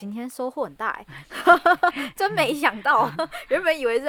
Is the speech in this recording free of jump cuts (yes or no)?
yes